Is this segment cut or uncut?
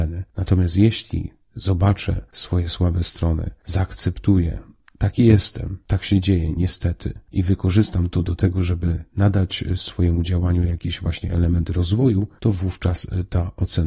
uncut